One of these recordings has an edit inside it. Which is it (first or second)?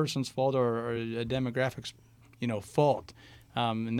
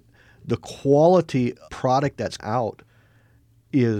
second